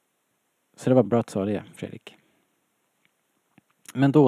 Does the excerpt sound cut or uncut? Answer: cut